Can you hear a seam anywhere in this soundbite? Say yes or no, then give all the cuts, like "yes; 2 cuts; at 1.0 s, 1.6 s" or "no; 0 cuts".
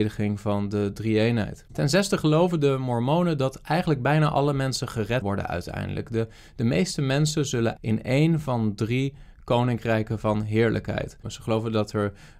yes; 2 cuts; at 5.2 s, 7.8 s